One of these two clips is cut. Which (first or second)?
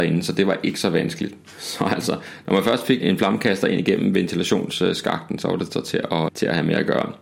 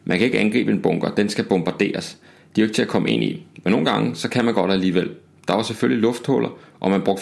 first